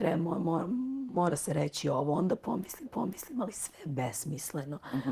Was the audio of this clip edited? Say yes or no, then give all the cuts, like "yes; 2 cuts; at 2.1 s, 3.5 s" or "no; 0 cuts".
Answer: yes; 1 cut; at 2.9 s